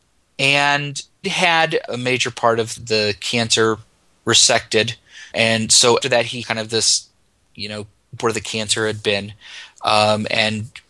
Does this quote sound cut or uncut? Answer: cut